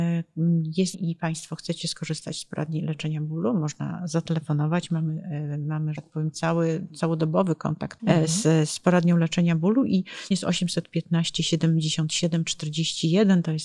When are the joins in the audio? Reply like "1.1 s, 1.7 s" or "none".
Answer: 0.9 s, 5.9 s, 8.0 s, 10.3 s